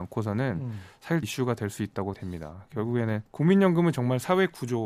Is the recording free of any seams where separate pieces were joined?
no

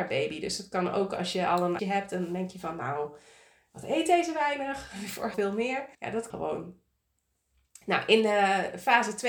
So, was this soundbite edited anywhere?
yes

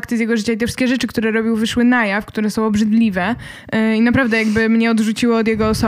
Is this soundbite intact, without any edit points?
yes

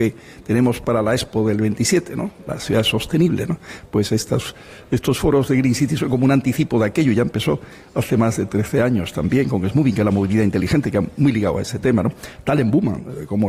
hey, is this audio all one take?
yes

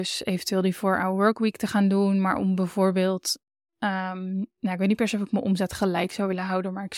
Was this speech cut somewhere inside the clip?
no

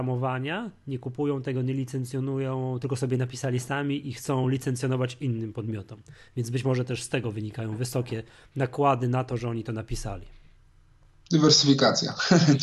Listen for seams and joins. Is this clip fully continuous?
yes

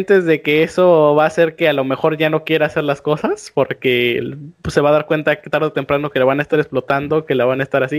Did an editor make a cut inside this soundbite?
no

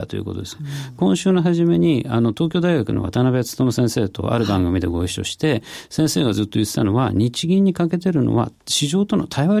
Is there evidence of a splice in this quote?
yes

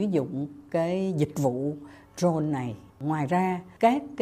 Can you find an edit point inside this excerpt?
yes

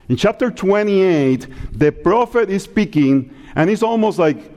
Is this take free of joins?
yes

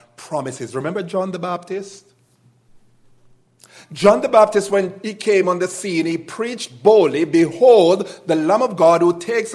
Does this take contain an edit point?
no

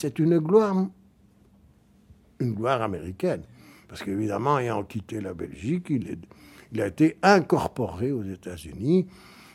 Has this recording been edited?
no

